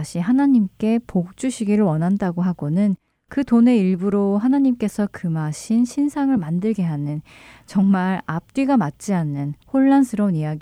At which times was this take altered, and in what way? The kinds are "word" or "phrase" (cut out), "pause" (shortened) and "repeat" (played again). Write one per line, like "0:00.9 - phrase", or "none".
none